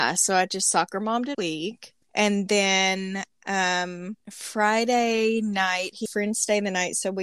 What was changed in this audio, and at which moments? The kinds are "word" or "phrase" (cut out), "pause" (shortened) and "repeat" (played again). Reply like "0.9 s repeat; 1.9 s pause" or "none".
1.3 s word; 2.0 s pause; 4.2 s pause; 6.1 s phrase